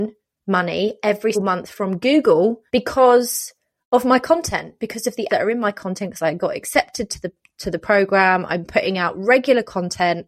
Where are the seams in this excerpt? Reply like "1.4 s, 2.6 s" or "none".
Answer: 1.3 s, 2.7 s, 5.3 s